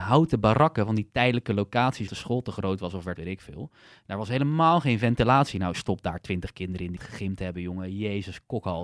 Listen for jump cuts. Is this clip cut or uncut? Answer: cut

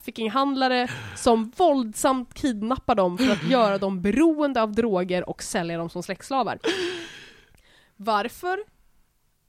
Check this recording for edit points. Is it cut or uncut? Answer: uncut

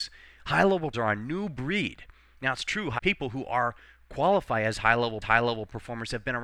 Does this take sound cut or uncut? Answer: cut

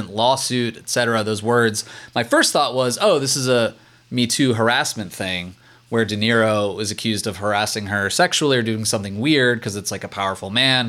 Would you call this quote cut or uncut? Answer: uncut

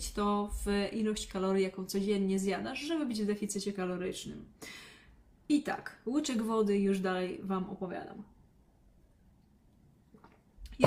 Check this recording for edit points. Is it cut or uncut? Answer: uncut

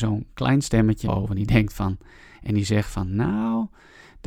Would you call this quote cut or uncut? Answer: cut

